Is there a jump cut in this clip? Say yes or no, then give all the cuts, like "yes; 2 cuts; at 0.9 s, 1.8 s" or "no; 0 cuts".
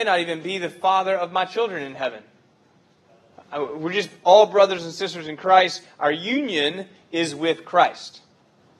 no; 0 cuts